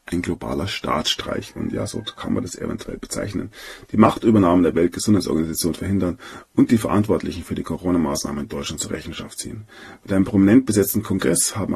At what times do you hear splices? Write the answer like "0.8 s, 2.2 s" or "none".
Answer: none